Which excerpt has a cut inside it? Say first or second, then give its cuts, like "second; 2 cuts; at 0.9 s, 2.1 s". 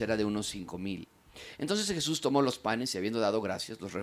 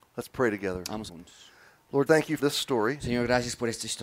second; 3 cuts; at 1.1 s, 2.1 s, 2.4 s